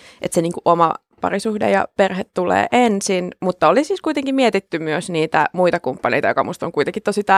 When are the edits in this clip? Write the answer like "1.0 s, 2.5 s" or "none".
none